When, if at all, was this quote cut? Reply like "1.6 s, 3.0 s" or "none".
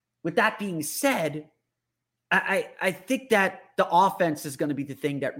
none

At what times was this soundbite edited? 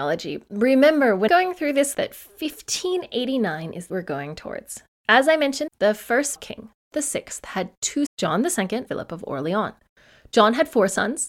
1.3 s, 1.9 s, 3.9 s, 5.7 s, 6.4 s, 6.9 s, 8.1 s, 8.9 s

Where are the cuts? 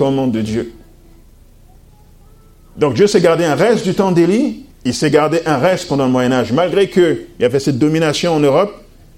4.7 s

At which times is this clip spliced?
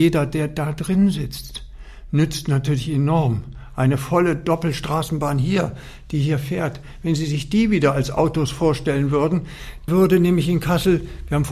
9.9 s

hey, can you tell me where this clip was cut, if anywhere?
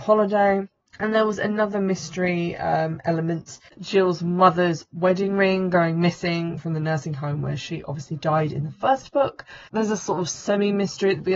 none

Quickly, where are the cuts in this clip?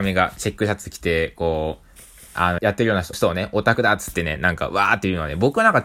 2.6 s, 3.1 s

